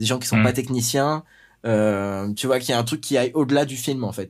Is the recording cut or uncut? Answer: uncut